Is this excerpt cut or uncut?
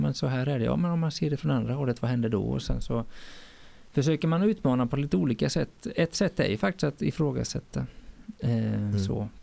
uncut